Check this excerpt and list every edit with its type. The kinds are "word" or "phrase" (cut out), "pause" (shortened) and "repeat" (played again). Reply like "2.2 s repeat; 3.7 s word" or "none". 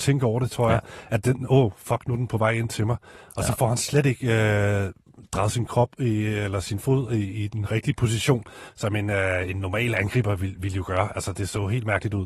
none